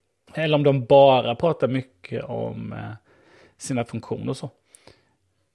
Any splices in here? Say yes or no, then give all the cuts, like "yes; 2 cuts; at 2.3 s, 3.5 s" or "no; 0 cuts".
no; 0 cuts